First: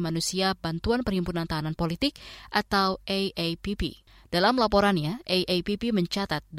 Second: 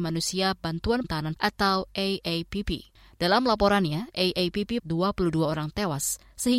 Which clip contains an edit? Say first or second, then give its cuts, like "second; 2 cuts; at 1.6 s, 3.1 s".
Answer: second; 3 cuts; at 1.0 s, 1.4 s, 4.8 s